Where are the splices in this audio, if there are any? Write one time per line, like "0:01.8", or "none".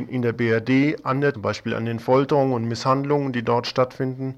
0:01.3